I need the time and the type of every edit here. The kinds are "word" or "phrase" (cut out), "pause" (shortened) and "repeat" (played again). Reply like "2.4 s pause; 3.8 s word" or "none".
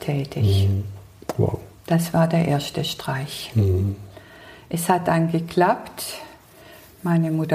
none

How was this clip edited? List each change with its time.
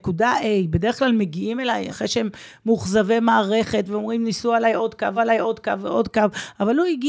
1.9 s word; 5.2 s repeat

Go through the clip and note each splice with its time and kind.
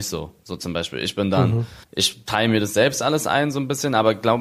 1.8 s pause

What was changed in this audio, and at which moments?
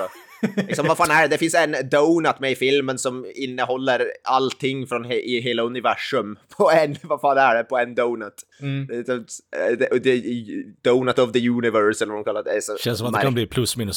8.5 s pause

